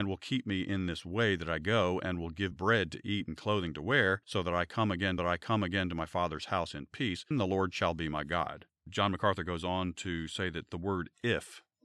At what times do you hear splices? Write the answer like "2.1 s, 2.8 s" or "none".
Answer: 2.5 s, 4.2 s, 5.2 s, 7.3 s, 8.8 s